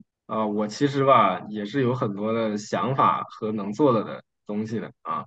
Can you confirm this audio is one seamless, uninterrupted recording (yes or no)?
yes